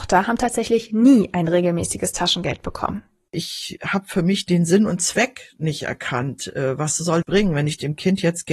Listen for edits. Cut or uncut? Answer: cut